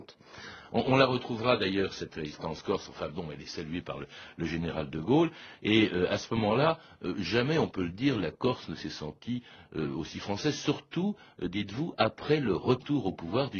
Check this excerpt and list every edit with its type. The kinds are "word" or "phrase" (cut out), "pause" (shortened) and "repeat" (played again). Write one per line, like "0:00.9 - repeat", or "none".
none